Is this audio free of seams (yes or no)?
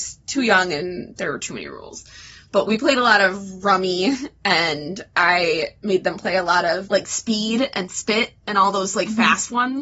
no